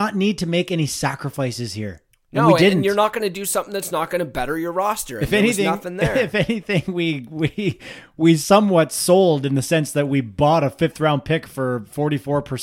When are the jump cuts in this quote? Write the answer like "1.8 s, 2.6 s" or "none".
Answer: none